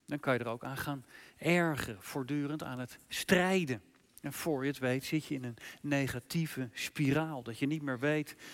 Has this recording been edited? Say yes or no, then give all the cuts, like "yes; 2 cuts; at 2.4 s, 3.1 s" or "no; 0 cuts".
no; 0 cuts